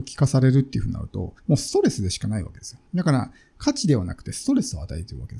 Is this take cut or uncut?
cut